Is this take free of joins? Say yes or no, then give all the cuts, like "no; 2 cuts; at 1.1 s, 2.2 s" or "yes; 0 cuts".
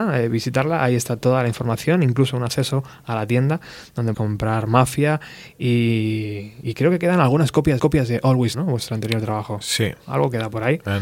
no; 4 cuts; at 4.1 s, 6.6 s, 7.8 s, 8.5 s